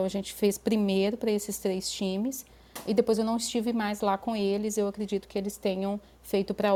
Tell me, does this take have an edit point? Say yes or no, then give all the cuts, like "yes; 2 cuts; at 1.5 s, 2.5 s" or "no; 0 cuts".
no; 0 cuts